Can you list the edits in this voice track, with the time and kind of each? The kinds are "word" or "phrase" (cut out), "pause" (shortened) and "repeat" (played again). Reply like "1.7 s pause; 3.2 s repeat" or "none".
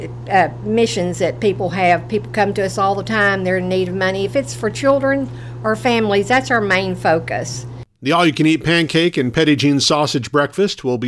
7.9 s pause